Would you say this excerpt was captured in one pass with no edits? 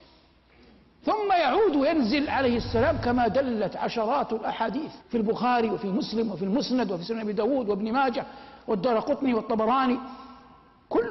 no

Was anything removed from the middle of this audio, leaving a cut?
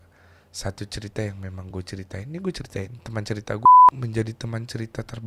no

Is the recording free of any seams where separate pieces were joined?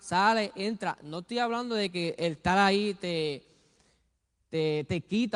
yes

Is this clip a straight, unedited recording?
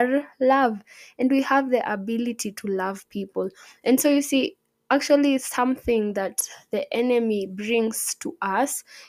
yes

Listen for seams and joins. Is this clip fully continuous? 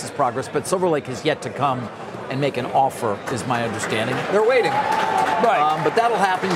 yes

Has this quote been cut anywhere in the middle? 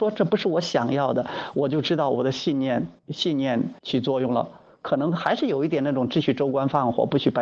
yes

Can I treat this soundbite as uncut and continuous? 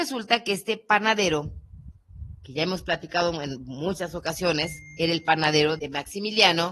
no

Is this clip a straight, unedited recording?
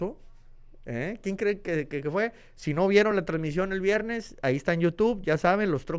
yes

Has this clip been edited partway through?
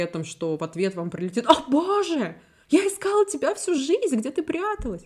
no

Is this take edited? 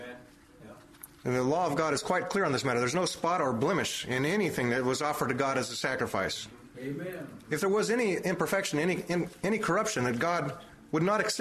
yes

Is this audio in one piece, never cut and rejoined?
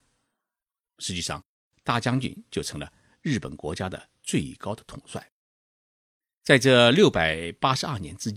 yes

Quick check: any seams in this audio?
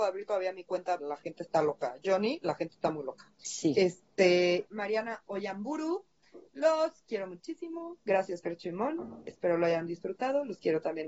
yes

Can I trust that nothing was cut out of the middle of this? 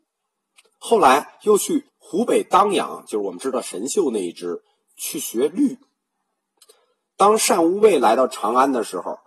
no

